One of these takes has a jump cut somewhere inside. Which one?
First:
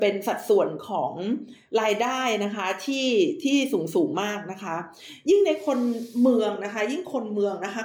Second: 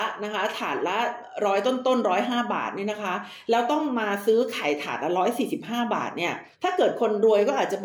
second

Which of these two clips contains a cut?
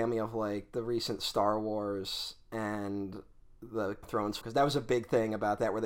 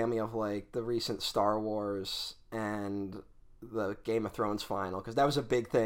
first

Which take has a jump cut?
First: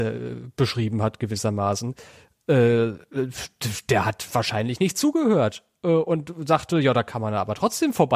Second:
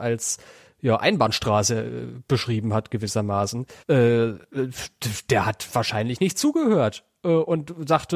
second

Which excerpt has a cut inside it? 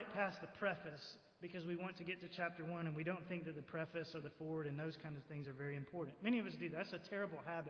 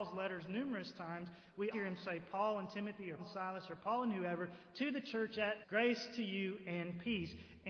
second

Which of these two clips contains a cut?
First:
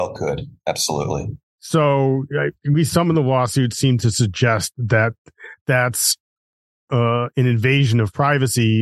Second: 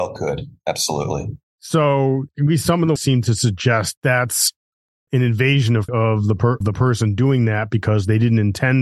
second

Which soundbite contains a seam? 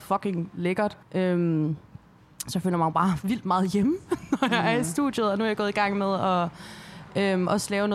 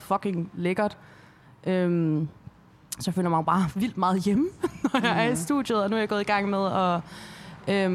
first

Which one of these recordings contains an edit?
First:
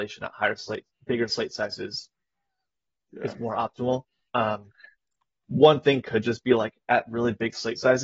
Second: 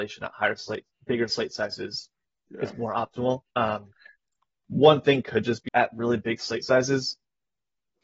second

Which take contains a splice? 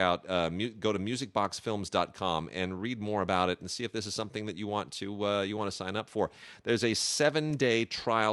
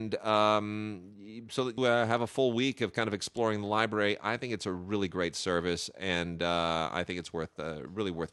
second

